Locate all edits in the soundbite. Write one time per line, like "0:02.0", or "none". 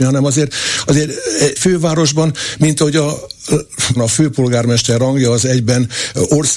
0:01.6
0:04.0